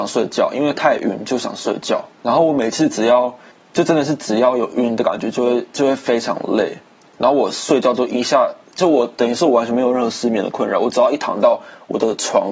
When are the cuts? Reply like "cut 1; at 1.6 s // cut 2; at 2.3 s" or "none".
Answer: cut 1; at 2.1 s // cut 2; at 3.5 s // cut 3; at 5.7 s // cut 4; at 7.0 s // cut 5; at 8.6 s